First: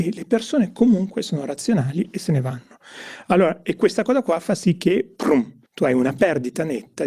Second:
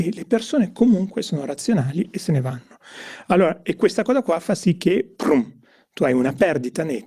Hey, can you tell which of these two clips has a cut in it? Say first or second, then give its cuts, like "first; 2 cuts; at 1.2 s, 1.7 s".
first; 1 cut; at 5.7 s